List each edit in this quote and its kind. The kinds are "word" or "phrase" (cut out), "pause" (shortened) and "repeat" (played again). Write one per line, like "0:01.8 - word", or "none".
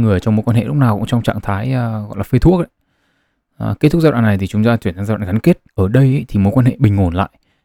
0:05.7 - pause